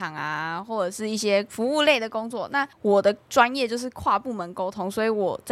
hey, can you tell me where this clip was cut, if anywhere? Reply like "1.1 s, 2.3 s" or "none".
2.7 s, 3.2 s